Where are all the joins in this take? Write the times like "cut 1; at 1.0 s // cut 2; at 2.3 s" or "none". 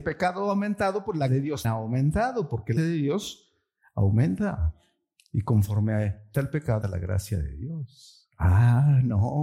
cut 1; at 1.3 s // cut 2; at 1.6 s // cut 3; at 2.8 s // cut 4; at 6.3 s // cut 5; at 6.8 s